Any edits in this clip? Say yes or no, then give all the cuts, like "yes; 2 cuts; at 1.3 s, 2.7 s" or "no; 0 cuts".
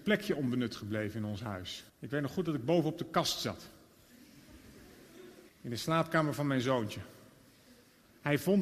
yes; 2 cuts; at 1.9 s, 5.5 s